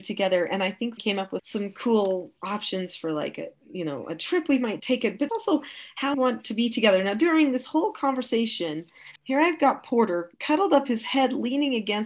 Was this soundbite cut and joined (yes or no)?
yes